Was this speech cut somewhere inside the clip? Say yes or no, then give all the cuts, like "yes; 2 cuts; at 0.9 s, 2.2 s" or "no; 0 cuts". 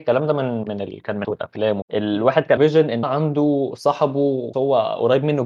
yes; 5 cuts; at 1.2 s, 1.8 s, 2.6 s, 3.0 s, 4.5 s